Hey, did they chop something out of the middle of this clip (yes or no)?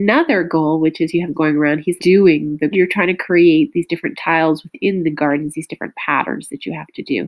yes